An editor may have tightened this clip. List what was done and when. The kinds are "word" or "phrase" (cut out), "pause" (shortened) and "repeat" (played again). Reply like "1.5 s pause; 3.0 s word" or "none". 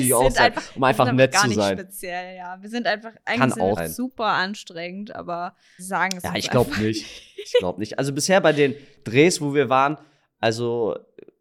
3.8 s word; 5.8 s word